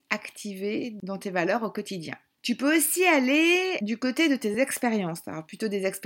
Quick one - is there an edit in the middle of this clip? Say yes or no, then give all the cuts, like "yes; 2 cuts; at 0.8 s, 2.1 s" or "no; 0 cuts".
no; 0 cuts